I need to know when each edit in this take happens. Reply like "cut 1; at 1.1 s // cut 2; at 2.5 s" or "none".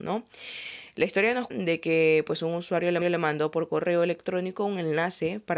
cut 1; at 1.5 s // cut 2; at 3.0 s